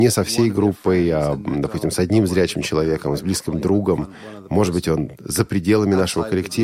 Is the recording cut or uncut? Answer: uncut